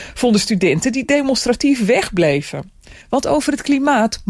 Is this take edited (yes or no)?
yes